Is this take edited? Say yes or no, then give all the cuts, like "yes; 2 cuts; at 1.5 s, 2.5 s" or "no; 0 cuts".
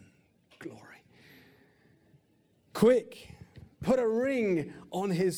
yes; 1 cut; at 3.7 s